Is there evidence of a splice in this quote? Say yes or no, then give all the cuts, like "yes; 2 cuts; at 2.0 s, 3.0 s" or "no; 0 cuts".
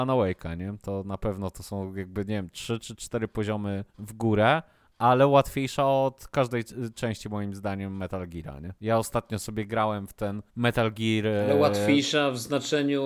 yes; 3 cuts; at 3.9 s, 8.8 s, 10.5 s